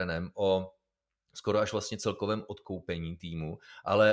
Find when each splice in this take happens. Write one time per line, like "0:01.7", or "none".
none